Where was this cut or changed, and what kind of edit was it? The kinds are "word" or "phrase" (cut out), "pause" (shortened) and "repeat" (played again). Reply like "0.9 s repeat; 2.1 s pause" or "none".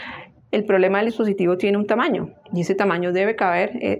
1.1 s phrase